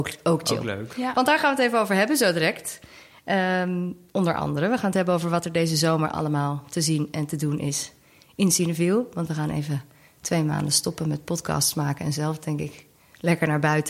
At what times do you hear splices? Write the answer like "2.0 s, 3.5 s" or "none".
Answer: none